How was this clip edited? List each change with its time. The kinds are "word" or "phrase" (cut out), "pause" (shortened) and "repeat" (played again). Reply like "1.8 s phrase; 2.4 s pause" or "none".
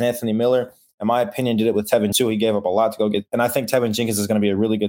2.1 s word